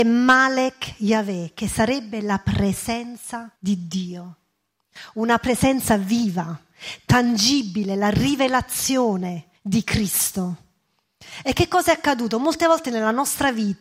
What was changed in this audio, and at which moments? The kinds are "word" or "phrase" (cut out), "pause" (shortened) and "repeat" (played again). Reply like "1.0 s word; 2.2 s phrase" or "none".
3.6 s pause; 9.6 s pause